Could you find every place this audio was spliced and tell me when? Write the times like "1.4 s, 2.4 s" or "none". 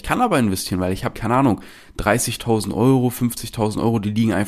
1.1 s